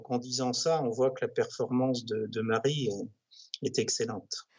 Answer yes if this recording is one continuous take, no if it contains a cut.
yes